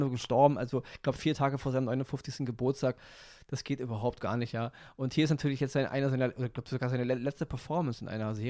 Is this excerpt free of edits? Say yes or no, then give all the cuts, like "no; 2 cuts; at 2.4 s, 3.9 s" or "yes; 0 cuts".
yes; 0 cuts